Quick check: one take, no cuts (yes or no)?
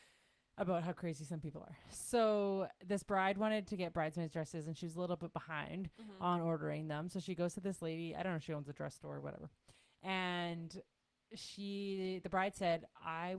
yes